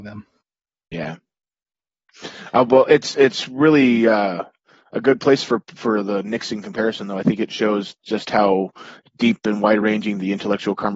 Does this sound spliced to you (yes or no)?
no